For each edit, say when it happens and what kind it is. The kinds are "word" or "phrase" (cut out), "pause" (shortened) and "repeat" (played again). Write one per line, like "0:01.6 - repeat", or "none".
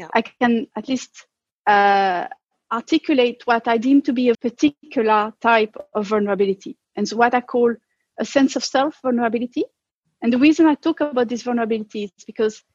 0:04.3 - word